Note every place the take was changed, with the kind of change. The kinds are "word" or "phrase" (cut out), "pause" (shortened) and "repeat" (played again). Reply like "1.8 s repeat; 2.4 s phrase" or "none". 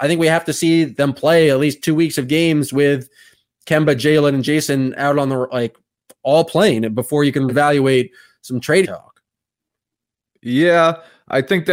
1.0 s word; 7.5 s word; 8.8 s word